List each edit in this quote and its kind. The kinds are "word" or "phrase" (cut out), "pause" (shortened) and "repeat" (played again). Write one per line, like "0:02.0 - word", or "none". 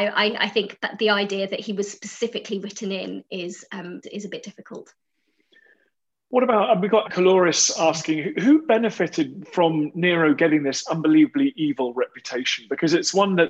0:04.0 - word
0:07.1 - word